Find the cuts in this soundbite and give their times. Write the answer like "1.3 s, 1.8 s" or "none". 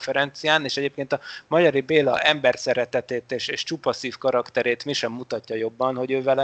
none